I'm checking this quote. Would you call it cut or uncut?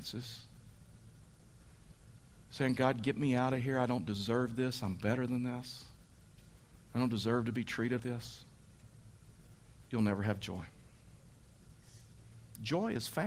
cut